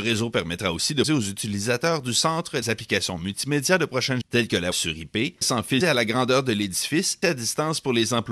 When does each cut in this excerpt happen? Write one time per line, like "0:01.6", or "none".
0:01.0
0:02.6
0:04.2
0:04.7
0:05.4
0:05.8
0:07.2